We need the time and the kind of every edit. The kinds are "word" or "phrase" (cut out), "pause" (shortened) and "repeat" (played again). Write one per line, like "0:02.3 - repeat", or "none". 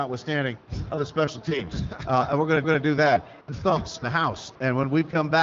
0:02.6 - repeat
0:03.4 - pause
0:04.0 - word

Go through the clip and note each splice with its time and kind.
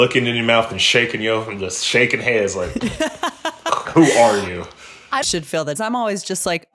0:03.8 - word
0:05.2 - phrase
0:05.7 - phrase

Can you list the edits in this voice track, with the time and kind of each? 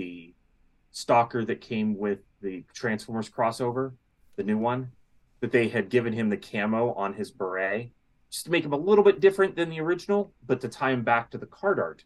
none

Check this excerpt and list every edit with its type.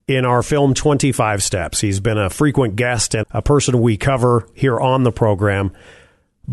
0:03.2 - word

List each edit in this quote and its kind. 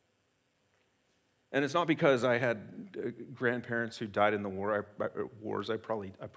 none

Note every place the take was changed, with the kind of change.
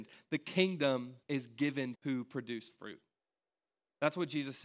0:01.2 - pause
0:02.0 - phrase

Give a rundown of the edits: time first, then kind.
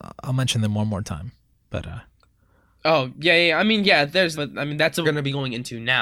0:04.3 - word
0:05.0 - word

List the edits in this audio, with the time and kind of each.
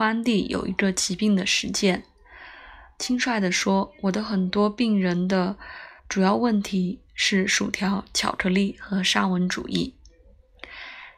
0:06.0 - pause

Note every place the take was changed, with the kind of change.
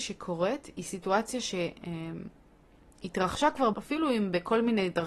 0:03.7 - word

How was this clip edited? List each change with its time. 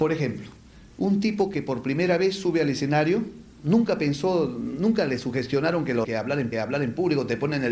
0:06.0 - word
0:06.5 - repeat

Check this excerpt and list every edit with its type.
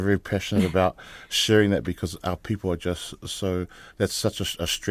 none

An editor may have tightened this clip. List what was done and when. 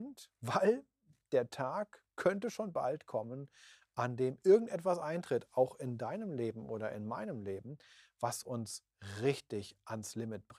none

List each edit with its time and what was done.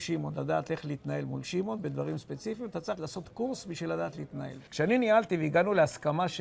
0:02.9 - word
0:04.7 - pause

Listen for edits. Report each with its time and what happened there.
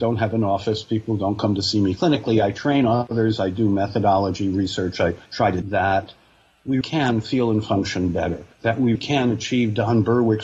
0:05.3 - pause
0:05.6 - word
0:06.8 - word
0:08.5 - pause
0:09.0 - word

